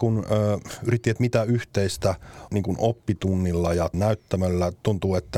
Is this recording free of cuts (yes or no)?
no